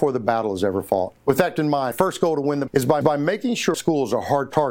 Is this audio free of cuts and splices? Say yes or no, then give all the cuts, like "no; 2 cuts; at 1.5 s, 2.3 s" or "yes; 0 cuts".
no; 6 cuts; at 1.2 s, 1.6 s, 1.9 s, 2.7 s, 3.0 s, 3.7 s